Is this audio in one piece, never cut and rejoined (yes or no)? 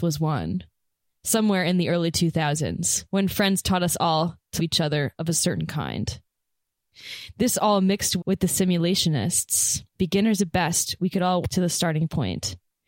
no